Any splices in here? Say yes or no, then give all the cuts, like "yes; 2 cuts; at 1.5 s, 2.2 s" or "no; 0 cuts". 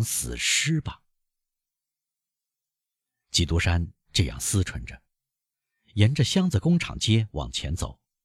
no; 0 cuts